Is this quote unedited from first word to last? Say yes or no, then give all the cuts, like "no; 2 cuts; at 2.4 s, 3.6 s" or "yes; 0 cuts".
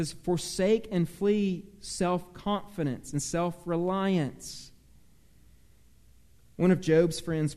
yes; 0 cuts